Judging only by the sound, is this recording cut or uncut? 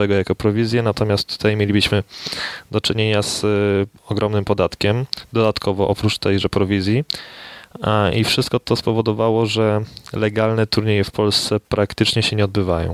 cut